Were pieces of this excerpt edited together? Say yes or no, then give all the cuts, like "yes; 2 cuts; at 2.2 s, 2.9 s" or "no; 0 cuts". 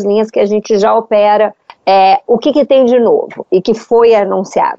no; 0 cuts